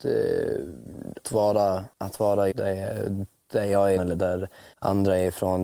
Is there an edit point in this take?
yes; 5 cuts; at 1.2 s, 1.9 s, 2.5 s, 4.0 s, 4.7 s

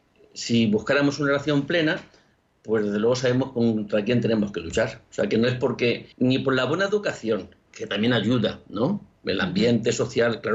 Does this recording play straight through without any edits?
no; 1 cut; at 6.1 s

